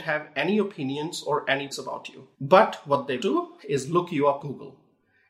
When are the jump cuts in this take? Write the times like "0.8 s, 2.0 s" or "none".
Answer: 1.7 s, 2.3 s, 3.2 s, 3.6 s, 4.4 s